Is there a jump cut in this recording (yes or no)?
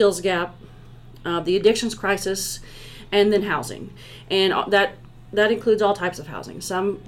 no